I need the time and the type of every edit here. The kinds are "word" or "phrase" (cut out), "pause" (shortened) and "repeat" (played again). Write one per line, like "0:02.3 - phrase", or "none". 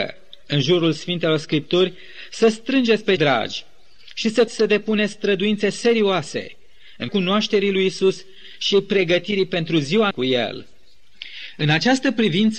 0:03.2 - word
0:04.5 - word
0:07.1 - word
0:10.1 - word